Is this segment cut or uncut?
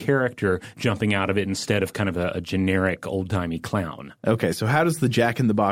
uncut